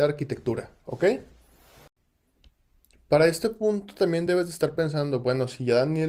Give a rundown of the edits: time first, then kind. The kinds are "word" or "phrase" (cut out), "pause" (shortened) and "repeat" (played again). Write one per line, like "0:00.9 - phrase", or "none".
none